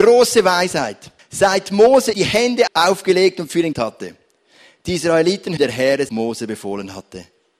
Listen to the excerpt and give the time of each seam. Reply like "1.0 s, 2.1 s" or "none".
1.2 s, 2.1 s, 2.7 s, 3.7 s, 5.6 s, 6.1 s